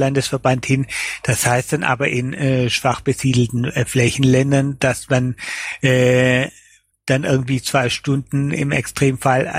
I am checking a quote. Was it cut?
no; 0 cuts

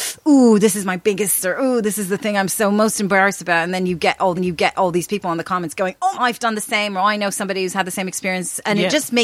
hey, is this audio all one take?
no; 3 cuts; at 1.4 s, 4.4 s, 6.1 s

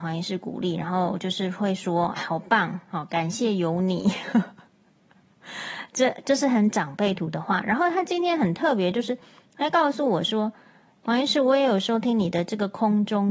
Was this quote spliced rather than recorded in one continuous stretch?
yes; 2 cuts; at 2.2 s, 11.0 s

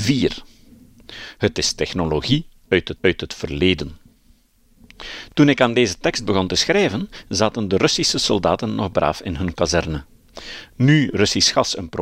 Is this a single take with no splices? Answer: no; 1 cut; at 3.0 s

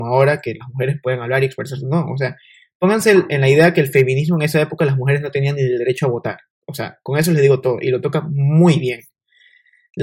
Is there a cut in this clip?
no; 0 cuts

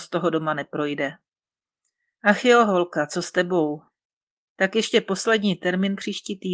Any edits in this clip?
no; 0 cuts

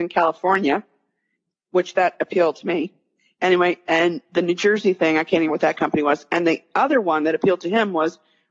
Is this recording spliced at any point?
yes; 1 cut; at 5.5 s

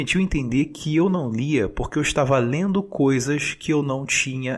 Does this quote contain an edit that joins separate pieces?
no; 0 cuts

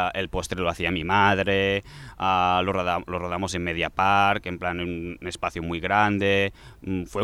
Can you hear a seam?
no; 0 cuts

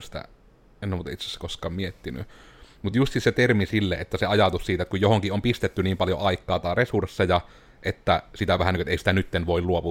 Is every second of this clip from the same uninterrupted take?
yes; 0 cuts

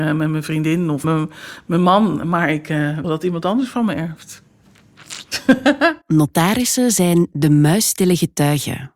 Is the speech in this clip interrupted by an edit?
yes; 3 cuts; at 1.0 s, 3.0 s, 6.0 s

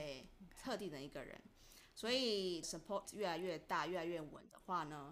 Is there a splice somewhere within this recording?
yes; 2 cuts; at 2.6 s, 3.0 s

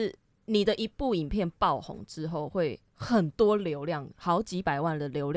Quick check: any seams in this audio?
yes; 1 cut; at 2.9 s

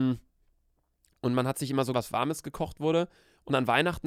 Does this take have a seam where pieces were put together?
yes; 1 cut; at 1.9 s

